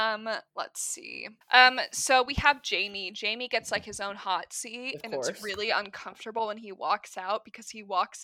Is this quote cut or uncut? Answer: cut